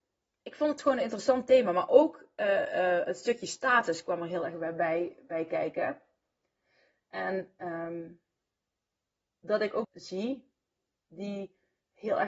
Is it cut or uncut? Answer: cut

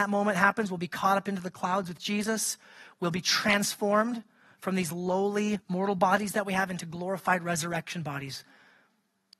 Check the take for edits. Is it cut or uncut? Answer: cut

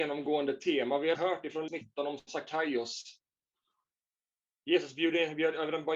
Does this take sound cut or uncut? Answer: cut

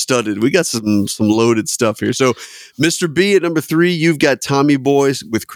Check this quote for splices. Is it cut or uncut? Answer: uncut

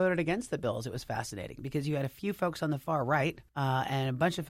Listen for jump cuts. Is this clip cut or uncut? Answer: cut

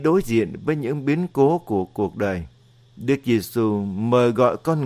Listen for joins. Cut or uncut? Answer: cut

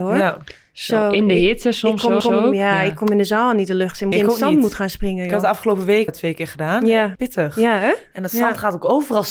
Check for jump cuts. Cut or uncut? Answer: cut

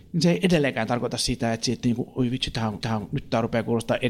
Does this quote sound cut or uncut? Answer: cut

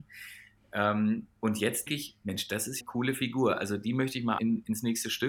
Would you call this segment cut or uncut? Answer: cut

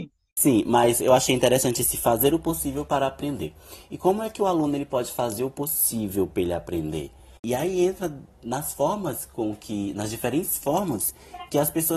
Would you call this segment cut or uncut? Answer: uncut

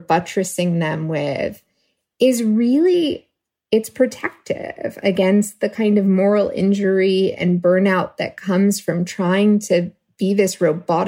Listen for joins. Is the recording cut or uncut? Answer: uncut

